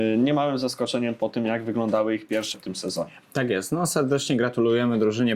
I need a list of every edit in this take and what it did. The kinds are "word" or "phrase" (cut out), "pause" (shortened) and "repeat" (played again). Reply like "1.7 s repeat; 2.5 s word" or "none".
2.5 s word